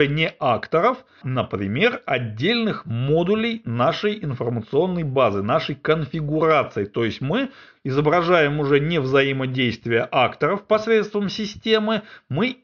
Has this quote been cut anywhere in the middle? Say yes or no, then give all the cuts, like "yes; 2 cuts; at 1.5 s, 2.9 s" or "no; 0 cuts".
yes; 1 cut; at 1.2 s